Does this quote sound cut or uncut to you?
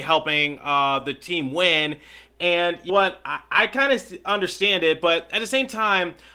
cut